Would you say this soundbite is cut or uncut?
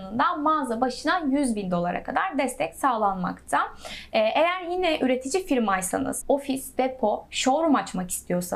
cut